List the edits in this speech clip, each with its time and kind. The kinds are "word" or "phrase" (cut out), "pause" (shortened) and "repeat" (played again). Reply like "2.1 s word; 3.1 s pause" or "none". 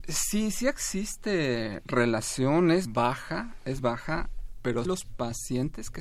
2.9 s word; 3.8 s word; 4.9 s word